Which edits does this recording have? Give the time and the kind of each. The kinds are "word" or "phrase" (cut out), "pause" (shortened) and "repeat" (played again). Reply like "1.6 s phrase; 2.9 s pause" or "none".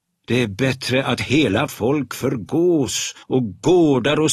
1.7 s word; 3.2 s pause